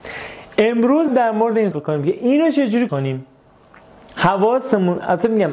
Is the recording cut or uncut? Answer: cut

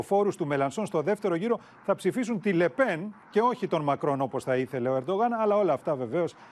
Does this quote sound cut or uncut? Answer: uncut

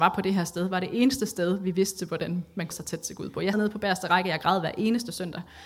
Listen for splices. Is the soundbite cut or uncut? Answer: cut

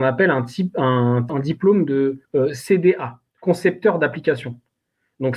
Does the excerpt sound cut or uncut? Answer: cut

